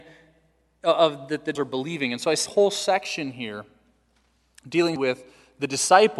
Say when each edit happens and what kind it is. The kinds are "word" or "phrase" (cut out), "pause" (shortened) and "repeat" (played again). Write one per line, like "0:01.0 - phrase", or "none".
0:01.5 - word
0:02.5 - word
0:05.0 - word